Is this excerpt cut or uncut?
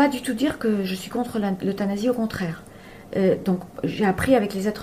uncut